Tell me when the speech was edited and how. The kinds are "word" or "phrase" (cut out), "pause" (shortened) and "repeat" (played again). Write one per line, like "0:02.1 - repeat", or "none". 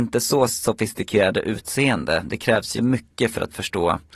0:02.8 - word